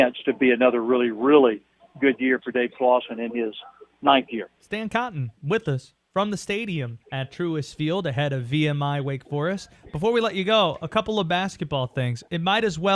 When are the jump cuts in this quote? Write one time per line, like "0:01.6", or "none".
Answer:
0:04.6
0:05.4
0:07.0